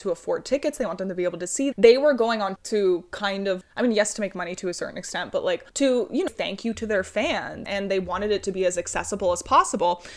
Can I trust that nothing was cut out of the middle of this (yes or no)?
no